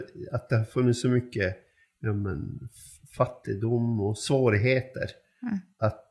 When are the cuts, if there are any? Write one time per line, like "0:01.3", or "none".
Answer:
none